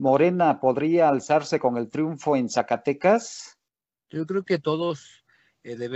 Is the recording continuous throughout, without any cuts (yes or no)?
no